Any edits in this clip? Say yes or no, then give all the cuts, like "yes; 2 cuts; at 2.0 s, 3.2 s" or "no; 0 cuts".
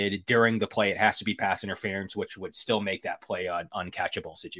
no; 0 cuts